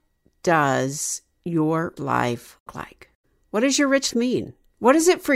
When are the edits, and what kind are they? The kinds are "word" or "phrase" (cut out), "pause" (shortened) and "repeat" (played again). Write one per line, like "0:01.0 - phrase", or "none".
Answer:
0:02.0 - word
0:02.7 - word
0:03.2 - pause
0:04.1 - word